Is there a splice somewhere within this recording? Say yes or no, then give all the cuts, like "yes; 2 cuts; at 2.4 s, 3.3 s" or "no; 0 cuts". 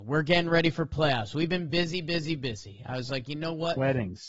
no; 0 cuts